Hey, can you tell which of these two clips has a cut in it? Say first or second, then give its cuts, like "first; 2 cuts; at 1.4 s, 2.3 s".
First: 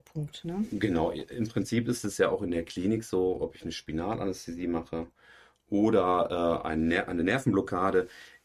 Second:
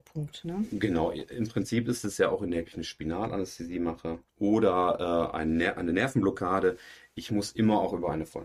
second; 2 cuts; at 2.6 s, 4.3 s